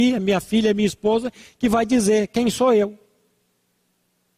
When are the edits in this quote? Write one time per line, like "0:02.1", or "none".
none